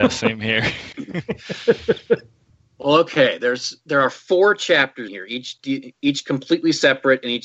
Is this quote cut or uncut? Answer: uncut